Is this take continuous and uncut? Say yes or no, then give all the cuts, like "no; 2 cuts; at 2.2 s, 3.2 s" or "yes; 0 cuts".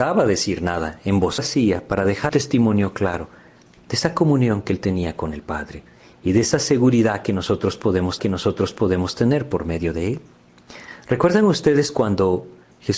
no; 3 cuts; at 1.4 s, 2.3 s, 8.2 s